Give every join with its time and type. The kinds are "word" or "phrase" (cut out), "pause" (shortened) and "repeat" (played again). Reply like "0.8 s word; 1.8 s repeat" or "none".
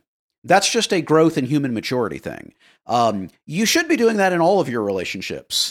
none